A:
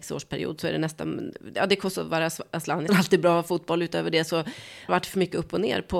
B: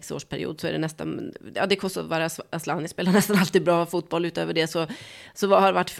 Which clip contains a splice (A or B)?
A